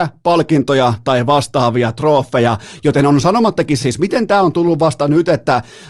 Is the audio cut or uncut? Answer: cut